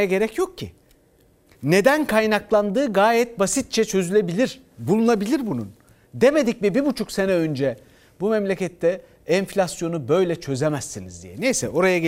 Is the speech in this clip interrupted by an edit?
no; 0 cuts

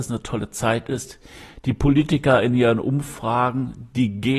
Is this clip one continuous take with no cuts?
yes; 0 cuts

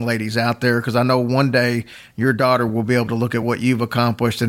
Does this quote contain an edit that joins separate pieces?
no; 0 cuts

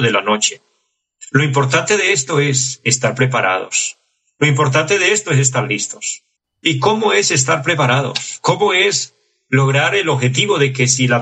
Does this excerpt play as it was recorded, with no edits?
no; 1 cut; at 6.4 s

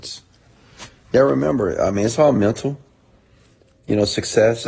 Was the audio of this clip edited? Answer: no; 0 cuts

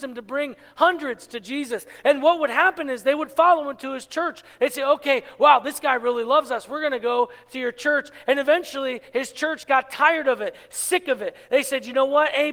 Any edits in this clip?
no; 0 cuts

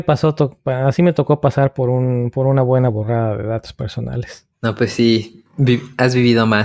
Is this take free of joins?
no; 1 cut; at 4.5 s

